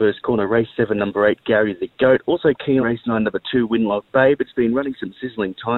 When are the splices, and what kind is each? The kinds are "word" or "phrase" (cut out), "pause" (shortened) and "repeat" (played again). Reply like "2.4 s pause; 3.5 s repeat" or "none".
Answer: 2.8 s word

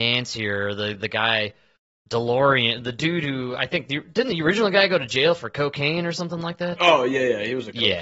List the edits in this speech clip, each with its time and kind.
none

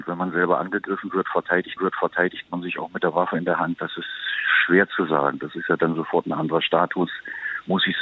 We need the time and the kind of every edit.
1.8 s repeat

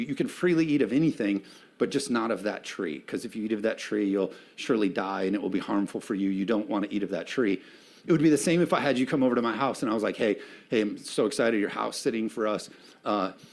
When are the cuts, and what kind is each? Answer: none

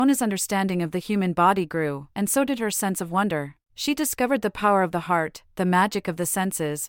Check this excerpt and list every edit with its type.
2.1 s pause; 3.6 s pause

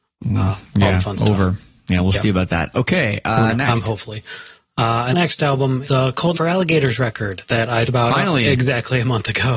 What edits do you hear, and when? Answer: 5.1 s word; 5.8 s word; 6.3 s word; 7.9 s word

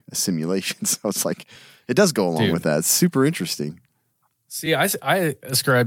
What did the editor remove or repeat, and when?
none

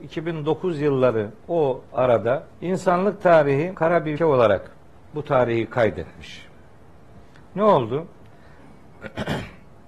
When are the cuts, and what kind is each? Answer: 1.4 s pause; 2.5 s pause; 3.7 s word; 4.2 s word

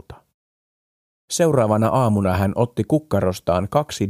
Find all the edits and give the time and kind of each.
none

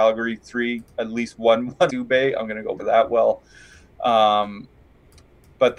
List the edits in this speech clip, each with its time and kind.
0.9 s word; 1.9 s word; 2.8 s word

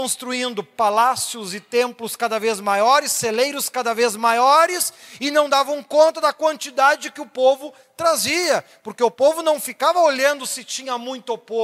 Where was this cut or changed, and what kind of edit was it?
none

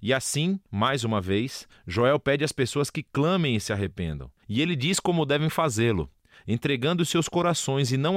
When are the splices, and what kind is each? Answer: none

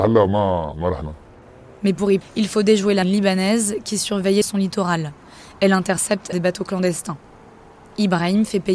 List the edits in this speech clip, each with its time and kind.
2.2 s word; 3.0 s word; 4.4 s word; 6.3 s word

